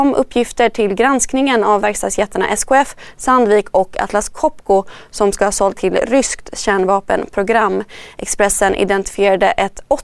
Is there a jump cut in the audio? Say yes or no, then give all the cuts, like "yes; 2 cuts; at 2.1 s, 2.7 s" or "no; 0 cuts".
yes; 2 cuts; at 1.8 s, 5.7 s